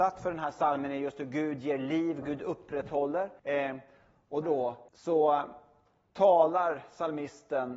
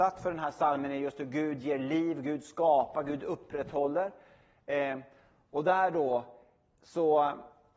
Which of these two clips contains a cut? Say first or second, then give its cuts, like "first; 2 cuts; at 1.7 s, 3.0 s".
first; 4 cuts; at 2.2 s, 3.4 s, 4.4 s, 4.9 s